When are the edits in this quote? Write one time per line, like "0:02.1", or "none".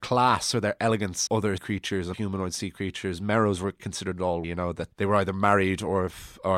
0:01.3
0:01.6
0:02.1
0:03.8
0:04.4
0:04.9